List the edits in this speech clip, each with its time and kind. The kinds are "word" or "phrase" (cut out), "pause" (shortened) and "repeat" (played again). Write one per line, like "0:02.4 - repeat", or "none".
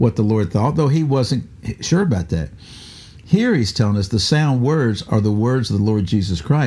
none